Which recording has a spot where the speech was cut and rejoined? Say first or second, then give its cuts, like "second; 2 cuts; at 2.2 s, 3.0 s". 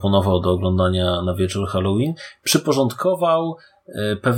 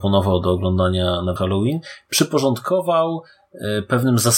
second; 1 cut; at 1.4 s